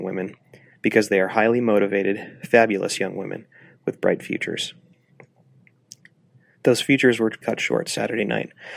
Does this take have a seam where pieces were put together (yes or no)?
yes